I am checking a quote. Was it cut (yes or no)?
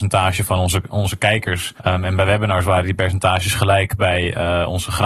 yes